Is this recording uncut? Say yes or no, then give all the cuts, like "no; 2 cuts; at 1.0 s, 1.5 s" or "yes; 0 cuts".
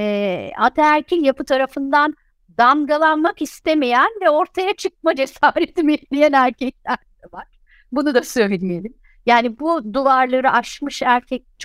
yes; 0 cuts